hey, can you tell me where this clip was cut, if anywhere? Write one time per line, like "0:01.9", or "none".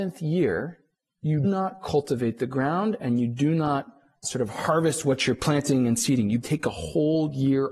0:01.4
0:06.4